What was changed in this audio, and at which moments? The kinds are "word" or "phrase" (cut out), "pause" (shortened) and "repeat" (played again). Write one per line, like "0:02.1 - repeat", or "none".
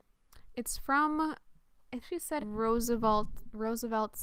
0:02.0 - word
0:02.4 - phrase